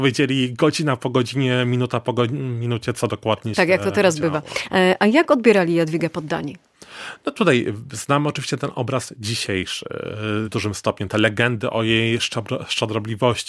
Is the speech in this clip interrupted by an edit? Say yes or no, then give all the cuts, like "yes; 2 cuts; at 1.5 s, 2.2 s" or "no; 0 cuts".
yes; 1 cut; at 10.4 s